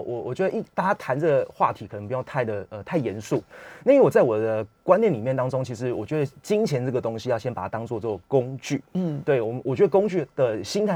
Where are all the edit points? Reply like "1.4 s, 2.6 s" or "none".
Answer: 8.9 s